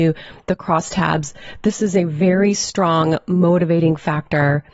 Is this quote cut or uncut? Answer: uncut